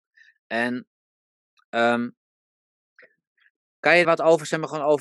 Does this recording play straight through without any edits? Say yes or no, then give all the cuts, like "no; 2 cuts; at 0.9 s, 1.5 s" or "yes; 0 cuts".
no; 1 cut; at 4.0 s